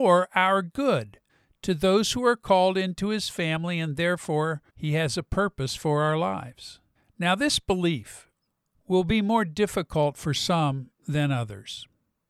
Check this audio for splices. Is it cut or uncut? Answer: cut